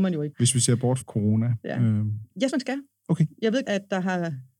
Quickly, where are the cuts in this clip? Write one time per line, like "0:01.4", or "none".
0:01.0
0:02.5
0:03.6